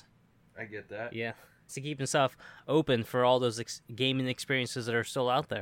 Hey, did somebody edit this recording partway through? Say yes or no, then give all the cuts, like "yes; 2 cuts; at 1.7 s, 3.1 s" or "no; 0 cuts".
yes; 1 cut; at 1.7 s